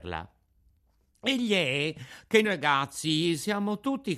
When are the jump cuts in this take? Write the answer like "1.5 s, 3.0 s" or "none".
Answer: 2.4 s